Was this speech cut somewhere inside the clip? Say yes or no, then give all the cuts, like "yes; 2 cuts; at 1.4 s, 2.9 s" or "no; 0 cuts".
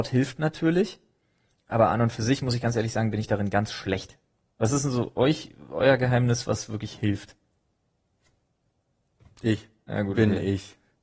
no; 0 cuts